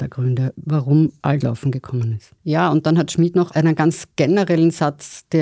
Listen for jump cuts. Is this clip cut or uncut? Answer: cut